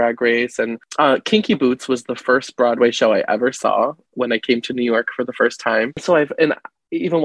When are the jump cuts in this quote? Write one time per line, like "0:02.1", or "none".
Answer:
none